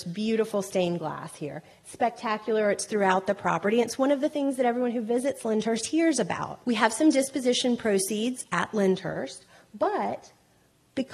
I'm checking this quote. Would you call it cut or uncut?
cut